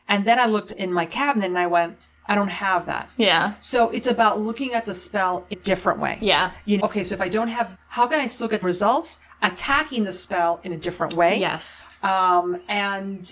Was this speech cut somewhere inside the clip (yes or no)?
yes